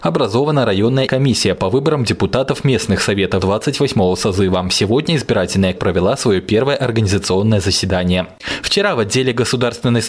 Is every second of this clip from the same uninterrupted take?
no; 3 cuts; at 1.1 s, 3.4 s, 5.8 s

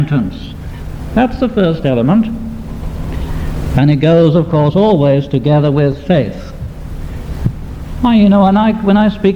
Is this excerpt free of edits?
yes; 0 cuts

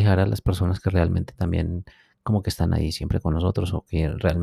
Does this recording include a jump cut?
no; 0 cuts

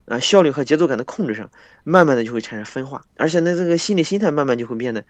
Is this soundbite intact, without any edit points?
no; 1 cut; at 3.1 s

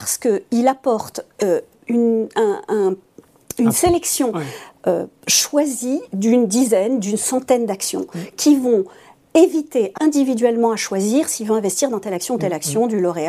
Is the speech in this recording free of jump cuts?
no; 4 cuts; at 1.7 s, 5.2 s, 9.2 s, 10.0 s

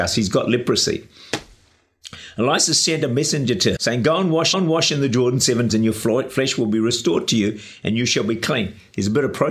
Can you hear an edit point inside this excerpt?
yes; 3 cuts; at 3.8 s, 4.5 s, 5.7 s

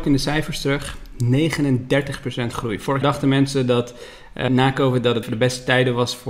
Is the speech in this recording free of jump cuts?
no; 3 cuts; at 3.0 s, 4.5 s, 5.2 s

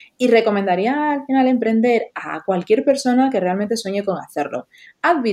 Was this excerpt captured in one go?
yes; 0 cuts

